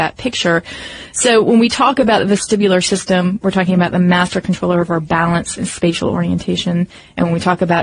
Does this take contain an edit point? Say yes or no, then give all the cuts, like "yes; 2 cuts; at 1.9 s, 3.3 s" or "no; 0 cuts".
no; 0 cuts